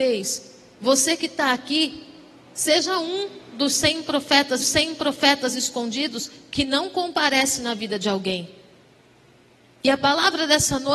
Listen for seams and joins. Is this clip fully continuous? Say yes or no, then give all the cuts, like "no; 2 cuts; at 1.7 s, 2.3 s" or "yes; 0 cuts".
no; 1 cut; at 4.6 s